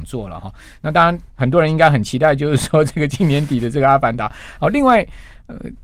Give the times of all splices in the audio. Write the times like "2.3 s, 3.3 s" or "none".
1.3 s